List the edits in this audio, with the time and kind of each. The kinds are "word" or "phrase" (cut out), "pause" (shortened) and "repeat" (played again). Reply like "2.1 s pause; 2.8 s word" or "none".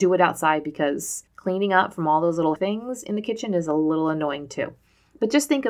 1.3 s pause; 2.6 s word